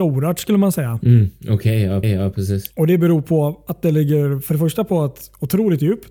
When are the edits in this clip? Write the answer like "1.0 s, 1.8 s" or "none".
2.0 s